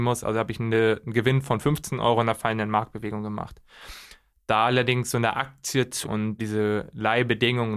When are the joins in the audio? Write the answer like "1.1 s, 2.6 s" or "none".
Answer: 6.0 s, 6.4 s